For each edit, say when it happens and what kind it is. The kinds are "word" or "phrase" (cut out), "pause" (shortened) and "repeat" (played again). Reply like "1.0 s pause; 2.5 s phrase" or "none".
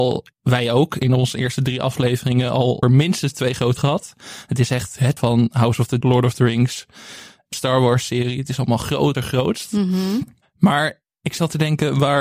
2.8 s word; 3.8 s word; 5.2 s word; 6.0 s word; 7.5 s word; 9.1 s word